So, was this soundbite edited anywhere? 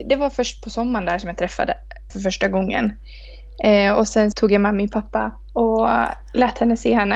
yes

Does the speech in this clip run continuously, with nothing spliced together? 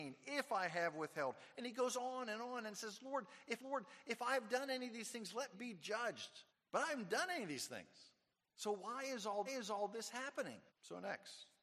no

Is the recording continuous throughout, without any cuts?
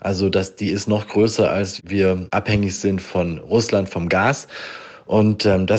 yes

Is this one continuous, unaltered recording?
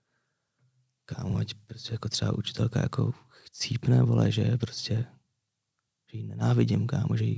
yes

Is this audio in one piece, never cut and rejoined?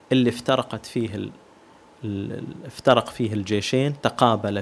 yes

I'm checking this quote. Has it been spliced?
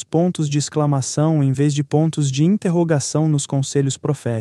no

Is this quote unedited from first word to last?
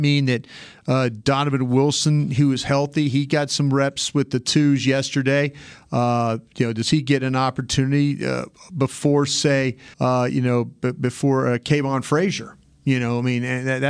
no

